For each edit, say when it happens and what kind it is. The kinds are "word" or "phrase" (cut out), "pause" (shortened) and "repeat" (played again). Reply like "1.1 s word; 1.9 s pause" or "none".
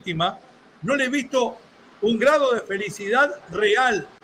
none

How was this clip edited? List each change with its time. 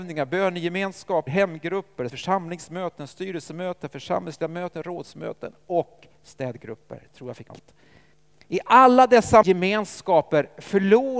1.3 s word; 2.1 s word; 6.1 s pause; 7.5 s word; 8.1 s pause; 9.4 s phrase

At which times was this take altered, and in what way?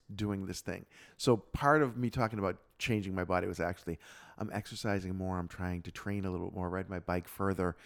none

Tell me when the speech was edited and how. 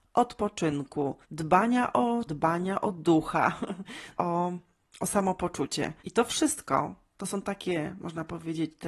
1.2 s pause; 2.3 s word; 4.2 s word; 6.0 s pause

